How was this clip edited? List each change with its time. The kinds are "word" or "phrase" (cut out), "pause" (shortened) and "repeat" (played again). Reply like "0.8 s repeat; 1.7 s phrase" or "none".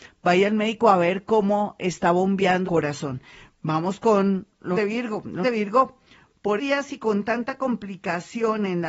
2.7 s word; 4.7 s word; 5.4 s word; 6.6 s word